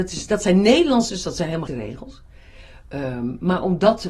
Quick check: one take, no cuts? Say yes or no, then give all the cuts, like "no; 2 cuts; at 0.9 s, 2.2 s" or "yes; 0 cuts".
no; 2 cuts; at 1.1 s, 1.7 s